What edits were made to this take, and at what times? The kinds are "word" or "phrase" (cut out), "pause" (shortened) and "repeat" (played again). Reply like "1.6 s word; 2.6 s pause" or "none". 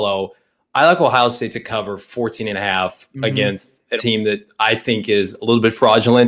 4.0 s word

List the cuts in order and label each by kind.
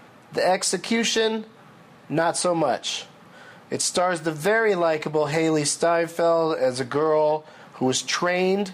none

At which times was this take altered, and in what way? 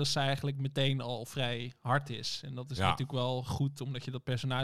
none

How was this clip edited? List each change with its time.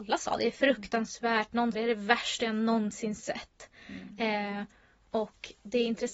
1.7 s word

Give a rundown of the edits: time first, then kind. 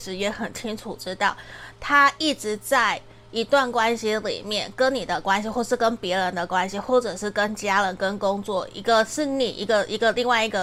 none

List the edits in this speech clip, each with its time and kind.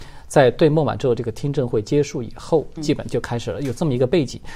2.8 s word

